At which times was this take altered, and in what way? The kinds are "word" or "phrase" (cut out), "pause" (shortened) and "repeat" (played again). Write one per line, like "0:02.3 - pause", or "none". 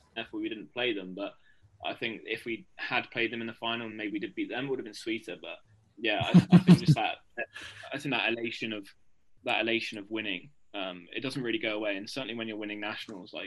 none